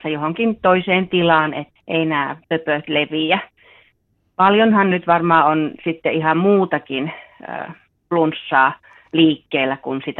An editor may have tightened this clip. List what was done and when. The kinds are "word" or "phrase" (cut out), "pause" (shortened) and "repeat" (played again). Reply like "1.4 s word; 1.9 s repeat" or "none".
1.8 s word; 2.4 s pause